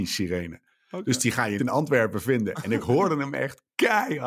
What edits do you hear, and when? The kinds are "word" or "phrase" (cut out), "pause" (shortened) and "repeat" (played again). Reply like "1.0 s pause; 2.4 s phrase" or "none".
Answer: 1.6 s word